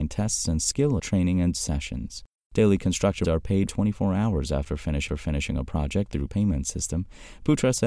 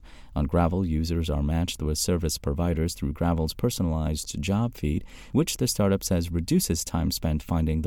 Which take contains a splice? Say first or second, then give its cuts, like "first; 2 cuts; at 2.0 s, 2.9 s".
first; 6 cuts; at 1.0 s, 1.5 s, 3.2 s, 3.7 s, 5.1 s, 6.3 s